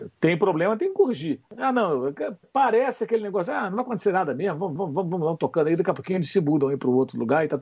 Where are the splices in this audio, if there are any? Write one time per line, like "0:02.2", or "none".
0:01.5
0:02.4
0:04.8